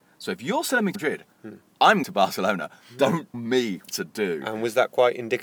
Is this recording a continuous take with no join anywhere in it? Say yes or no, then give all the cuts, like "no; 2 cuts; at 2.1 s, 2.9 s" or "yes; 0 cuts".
no; 4 cuts; at 0.9 s, 2.0 s, 3.3 s, 3.8 s